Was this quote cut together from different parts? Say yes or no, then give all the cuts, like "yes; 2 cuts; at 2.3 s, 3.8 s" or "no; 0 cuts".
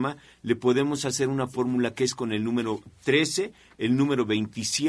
no; 0 cuts